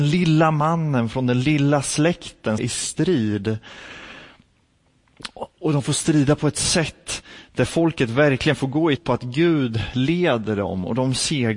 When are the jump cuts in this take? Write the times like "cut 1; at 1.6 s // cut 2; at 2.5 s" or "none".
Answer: cut 1; at 2.6 s // cut 2; at 5.5 s // cut 3; at 9.0 s